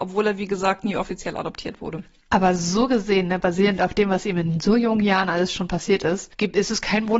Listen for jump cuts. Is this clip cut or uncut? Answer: uncut